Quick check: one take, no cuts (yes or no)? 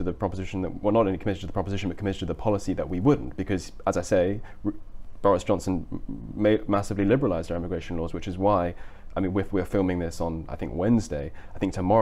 yes